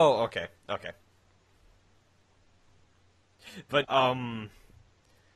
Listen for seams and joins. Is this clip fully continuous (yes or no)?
no